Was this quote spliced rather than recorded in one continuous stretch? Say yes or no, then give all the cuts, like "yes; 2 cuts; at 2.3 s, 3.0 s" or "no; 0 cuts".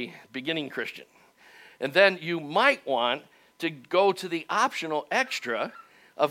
no; 0 cuts